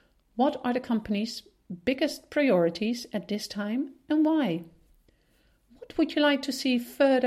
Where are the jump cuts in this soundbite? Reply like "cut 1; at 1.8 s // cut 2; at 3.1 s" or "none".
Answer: none